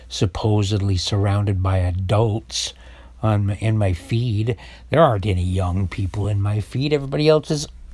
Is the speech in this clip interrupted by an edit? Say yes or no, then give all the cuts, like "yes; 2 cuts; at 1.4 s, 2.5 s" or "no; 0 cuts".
no; 0 cuts